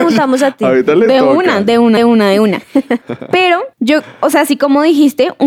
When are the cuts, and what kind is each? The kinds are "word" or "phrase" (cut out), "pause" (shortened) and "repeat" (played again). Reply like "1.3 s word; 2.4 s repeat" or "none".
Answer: 2.0 s repeat; 3.7 s pause